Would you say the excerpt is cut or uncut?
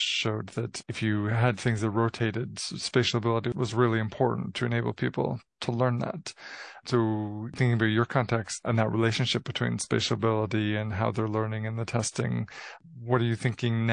uncut